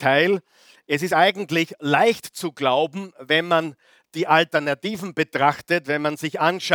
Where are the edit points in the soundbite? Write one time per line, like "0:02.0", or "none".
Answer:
none